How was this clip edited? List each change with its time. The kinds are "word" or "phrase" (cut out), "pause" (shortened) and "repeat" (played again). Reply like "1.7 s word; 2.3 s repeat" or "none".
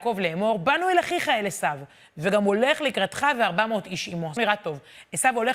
4.4 s word